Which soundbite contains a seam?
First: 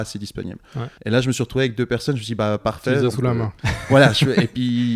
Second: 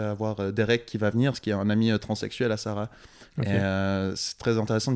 first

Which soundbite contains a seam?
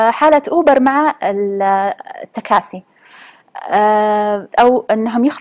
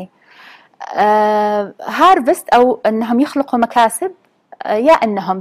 first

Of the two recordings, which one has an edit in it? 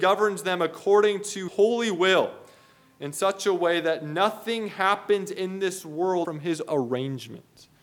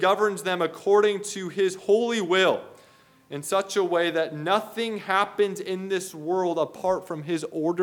first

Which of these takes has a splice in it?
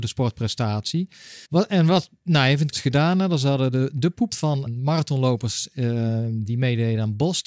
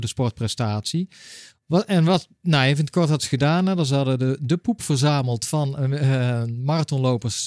first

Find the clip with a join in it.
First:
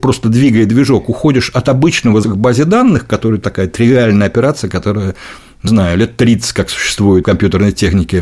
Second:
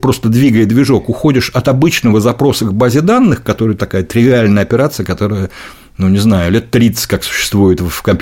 first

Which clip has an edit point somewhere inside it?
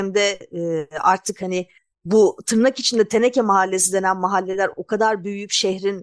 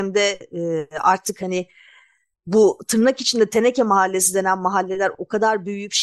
first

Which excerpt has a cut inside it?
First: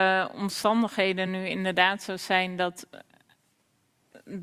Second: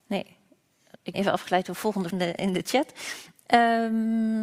second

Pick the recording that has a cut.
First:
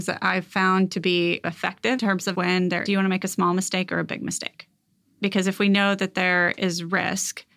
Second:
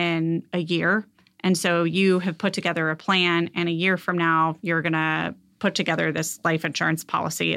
first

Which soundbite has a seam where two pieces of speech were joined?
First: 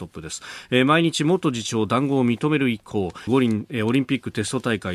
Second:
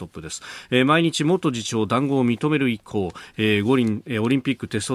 first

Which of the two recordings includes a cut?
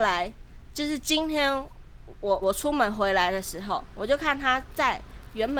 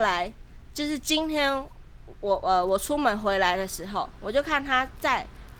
first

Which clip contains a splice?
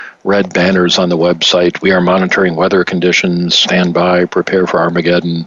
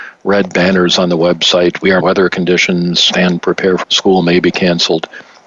second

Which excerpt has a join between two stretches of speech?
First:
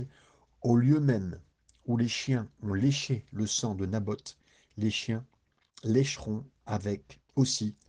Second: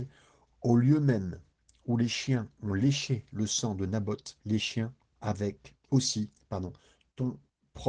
second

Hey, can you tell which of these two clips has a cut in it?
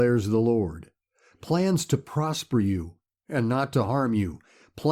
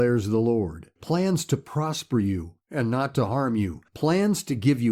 second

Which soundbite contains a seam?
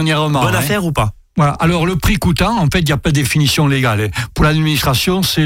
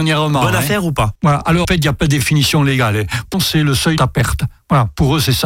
second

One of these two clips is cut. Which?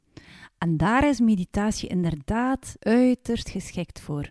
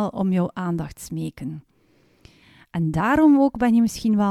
first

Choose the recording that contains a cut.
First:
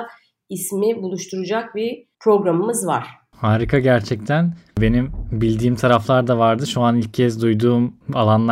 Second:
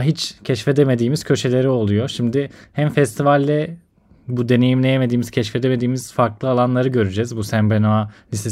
first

